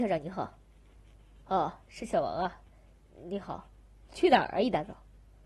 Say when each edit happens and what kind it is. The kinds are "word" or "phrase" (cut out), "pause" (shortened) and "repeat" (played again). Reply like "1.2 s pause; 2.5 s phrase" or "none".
none